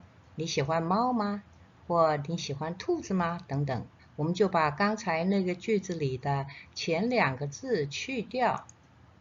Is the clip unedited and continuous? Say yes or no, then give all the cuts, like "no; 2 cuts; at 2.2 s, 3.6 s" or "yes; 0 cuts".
no; 1 cut; at 4.0 s